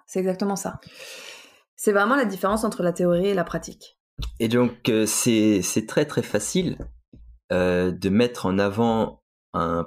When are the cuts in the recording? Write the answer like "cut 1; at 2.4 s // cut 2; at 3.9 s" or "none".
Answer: none